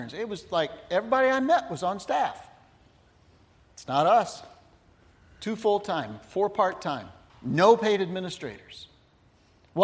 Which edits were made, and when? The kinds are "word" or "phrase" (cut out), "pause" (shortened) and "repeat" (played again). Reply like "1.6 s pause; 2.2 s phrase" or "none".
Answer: 7.3 s pause